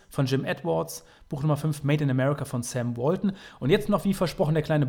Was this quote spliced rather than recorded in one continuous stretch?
no; 0 cuts

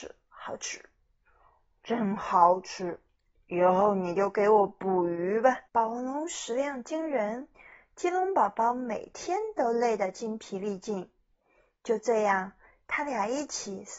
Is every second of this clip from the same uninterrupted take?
no; 1 cut; at 5.7 s

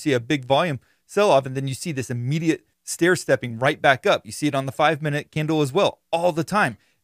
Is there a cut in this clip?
yes; 1 cut; at 2.7 s

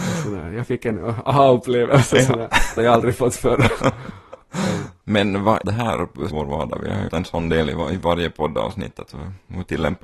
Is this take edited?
yes; 5 cuts; at 2.8 s, 5.0 s, 5.6 s, 6.3 s, 7.1 s

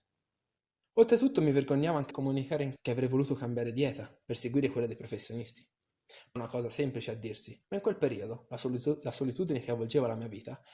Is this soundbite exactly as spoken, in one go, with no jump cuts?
no; 4 cuts; at 2.1 s, 2.8 s, 6.4 s, 7.6 s

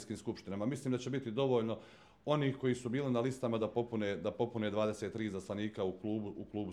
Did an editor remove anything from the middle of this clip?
no; 0 cuts

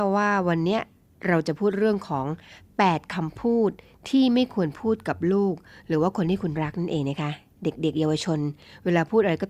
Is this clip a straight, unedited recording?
yes; 0 cuts

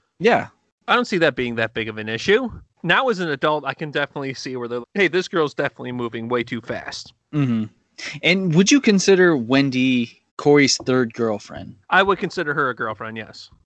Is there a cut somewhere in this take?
yes; 3 cuts; at 4.8 s, 10.3 s, 11.8 s

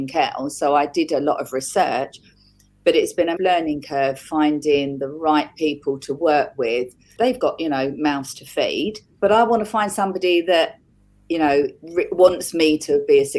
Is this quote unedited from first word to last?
no; 1 cut; at 3.4 s

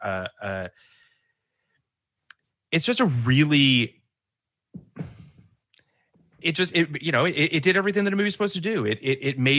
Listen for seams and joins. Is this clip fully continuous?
no; 1 cut; at 6.4 s

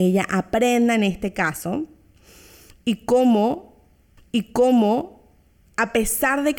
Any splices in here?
yes; 1 cut; at 4.2 s

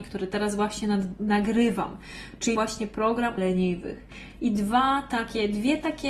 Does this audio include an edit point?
yes; 2 cuts; at 2.6 s, 3.4 s

